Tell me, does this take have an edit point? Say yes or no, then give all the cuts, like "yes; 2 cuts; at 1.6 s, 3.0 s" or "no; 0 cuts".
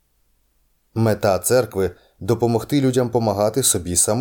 no; 0 cuts